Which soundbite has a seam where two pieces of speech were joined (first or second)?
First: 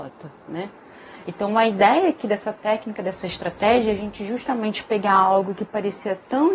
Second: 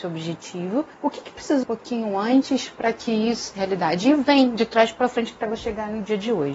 second